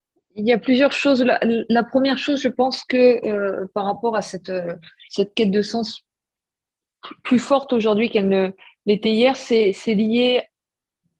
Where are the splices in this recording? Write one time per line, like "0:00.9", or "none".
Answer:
none